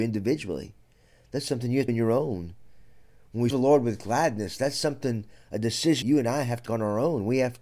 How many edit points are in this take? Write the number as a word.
four